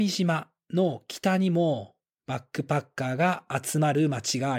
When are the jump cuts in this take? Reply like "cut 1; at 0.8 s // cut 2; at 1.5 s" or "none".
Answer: none